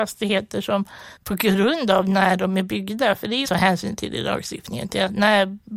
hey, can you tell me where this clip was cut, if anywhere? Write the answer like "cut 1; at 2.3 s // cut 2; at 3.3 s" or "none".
cut 1; at 1.2 s // cut 2; at 3.4 s